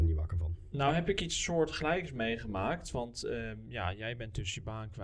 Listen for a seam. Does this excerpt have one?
no; 0 cuts

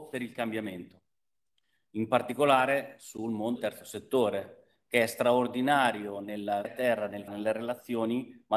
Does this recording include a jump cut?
yes; 3 cuts; at 3.6 s, 6.6 s, 7.3 s

